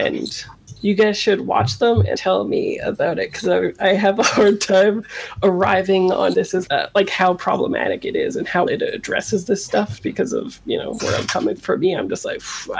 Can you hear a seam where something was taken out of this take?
yes; 7 cuts; at 2.1 s, 6.3 s, 6.7 s, 8.7 s, 10.0 s, 11.0 s, 11.6 s

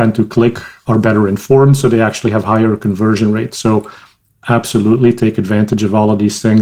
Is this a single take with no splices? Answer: yes; 0 cuts

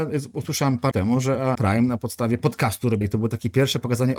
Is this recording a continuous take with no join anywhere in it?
no; 3 cuts; at 0.9 s, 1.5 s, 3.0 s

